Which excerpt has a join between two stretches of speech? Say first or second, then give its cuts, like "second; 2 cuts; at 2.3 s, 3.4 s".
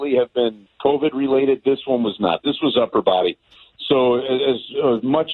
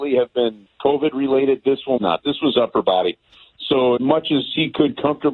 second; 2 cuts; at 2.0 s, 4.0 s